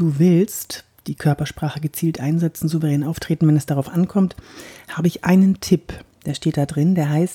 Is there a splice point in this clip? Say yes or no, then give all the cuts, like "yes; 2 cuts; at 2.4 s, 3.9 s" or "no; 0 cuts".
no; 0 cuts